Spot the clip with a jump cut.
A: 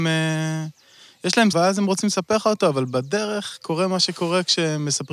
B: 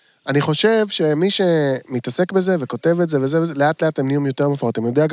A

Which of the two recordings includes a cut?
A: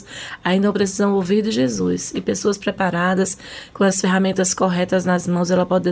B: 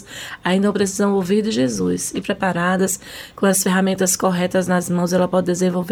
B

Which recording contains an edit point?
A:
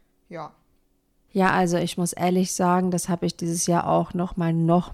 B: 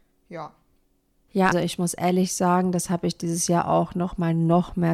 B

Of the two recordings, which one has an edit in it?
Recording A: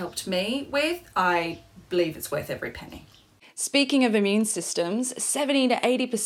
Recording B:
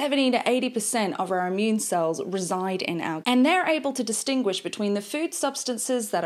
B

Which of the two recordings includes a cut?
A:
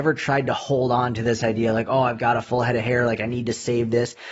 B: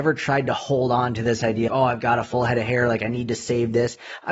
B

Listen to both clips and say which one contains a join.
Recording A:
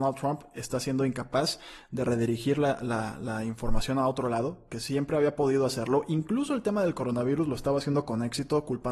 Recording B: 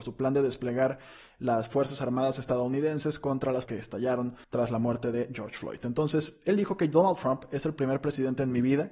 B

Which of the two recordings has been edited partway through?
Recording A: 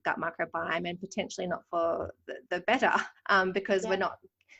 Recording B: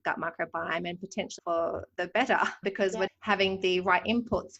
B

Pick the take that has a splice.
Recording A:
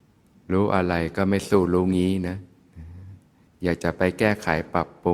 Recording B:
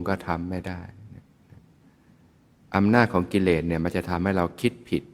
A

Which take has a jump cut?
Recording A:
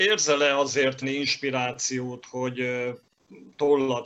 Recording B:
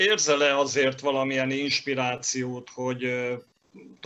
A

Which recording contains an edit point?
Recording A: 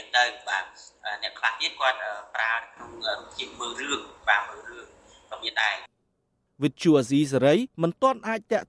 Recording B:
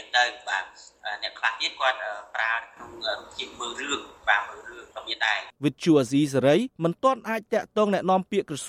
B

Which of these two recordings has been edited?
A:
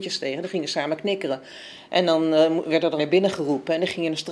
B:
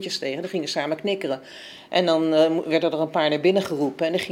A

